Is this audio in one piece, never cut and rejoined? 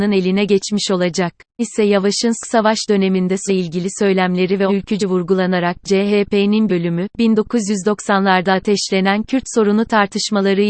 no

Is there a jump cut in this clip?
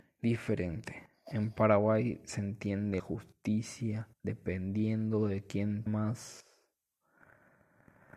yes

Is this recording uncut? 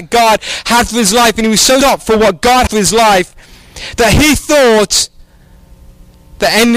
no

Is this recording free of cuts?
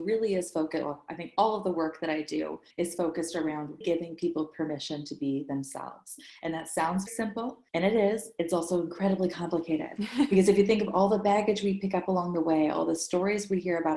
no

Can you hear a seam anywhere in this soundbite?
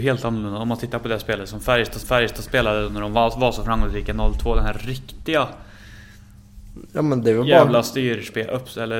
yes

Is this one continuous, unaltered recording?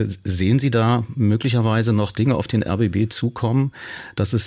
yes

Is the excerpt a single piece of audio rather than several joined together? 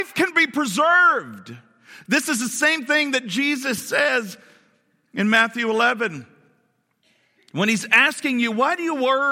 yes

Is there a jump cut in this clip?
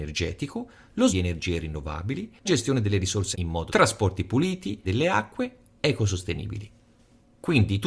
yes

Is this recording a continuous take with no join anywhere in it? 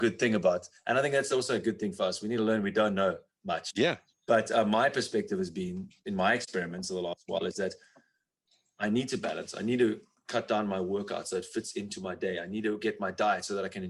yes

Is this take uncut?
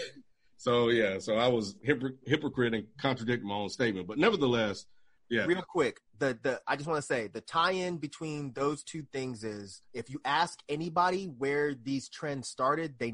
no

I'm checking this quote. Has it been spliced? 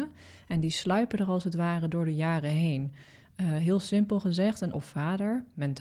yes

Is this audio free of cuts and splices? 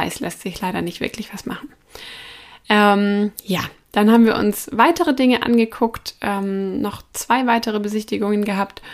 yes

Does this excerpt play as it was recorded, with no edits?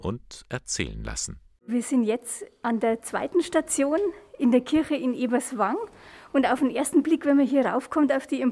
yes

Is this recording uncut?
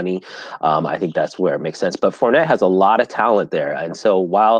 yes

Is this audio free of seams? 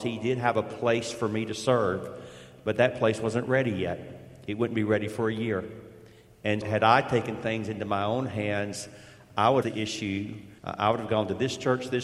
no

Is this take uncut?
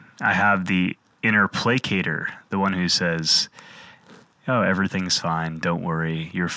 yes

